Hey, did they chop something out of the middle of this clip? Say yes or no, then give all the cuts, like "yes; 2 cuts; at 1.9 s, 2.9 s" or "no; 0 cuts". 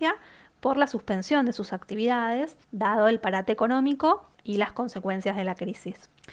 yes; 2 cuts; at 2.6 s, 4.3 s